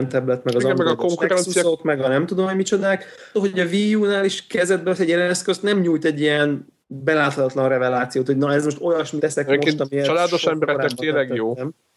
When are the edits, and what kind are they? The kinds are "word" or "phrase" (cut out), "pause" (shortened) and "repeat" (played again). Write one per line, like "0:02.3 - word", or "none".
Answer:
0:03.3 - phrase
0:06.8 - pause
0:09.2 - phrase